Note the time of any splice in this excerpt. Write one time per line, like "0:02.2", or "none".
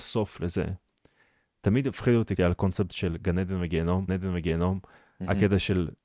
0:02.4
0:04.1